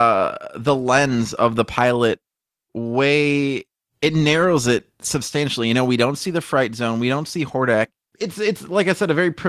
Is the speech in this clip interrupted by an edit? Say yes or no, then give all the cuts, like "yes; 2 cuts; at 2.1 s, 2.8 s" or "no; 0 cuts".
no; 0 cuts